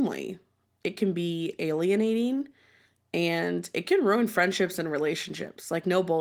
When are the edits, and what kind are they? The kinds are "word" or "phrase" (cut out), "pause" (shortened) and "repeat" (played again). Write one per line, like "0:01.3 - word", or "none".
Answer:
none